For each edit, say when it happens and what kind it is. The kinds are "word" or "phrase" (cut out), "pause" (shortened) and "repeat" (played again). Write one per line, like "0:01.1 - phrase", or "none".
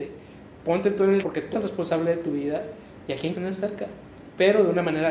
0:01.2 - word
0:01.5 - word
0:03.3 - word